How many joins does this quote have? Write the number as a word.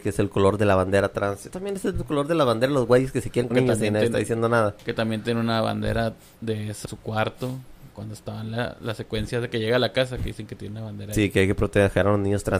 three